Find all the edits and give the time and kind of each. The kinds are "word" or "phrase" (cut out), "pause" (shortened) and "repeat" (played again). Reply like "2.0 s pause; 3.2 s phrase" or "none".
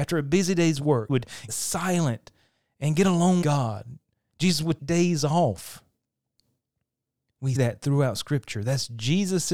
1.1 s word; 1.5 s word; 3.4 s word; 4.8 s word; 7.5 s word